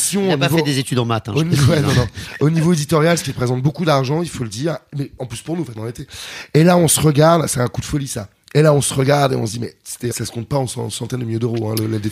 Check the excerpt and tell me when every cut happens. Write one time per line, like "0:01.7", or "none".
0:05.8
0:10.1